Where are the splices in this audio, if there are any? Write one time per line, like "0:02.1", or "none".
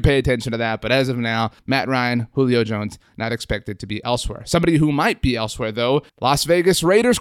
0:01.6
0:06.1